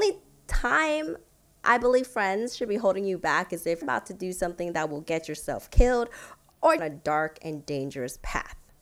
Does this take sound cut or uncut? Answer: cut